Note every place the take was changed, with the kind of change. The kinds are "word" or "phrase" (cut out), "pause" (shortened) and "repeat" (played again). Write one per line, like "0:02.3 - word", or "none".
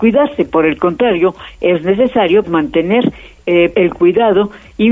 0:02.4 - word
0:03.7 - word